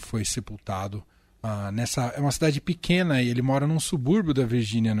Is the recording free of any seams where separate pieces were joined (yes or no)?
yes